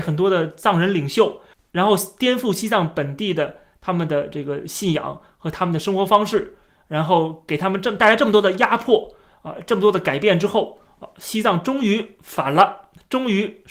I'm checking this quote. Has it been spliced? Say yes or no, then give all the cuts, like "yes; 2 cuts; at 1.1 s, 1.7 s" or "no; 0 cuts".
no; 0 cuts